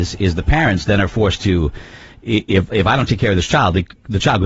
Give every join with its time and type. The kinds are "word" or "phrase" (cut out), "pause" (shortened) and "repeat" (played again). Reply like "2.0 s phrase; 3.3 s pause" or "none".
none